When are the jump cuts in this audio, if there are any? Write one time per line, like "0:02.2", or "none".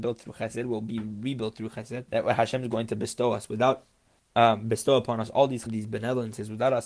0:02.1
0:04.2
0:05.7